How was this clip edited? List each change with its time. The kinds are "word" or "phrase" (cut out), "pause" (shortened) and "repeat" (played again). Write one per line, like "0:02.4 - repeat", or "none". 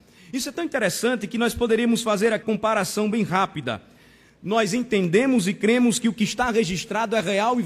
0:02.4 - word